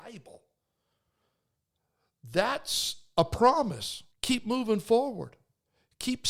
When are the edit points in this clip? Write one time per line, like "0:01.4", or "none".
0:04.1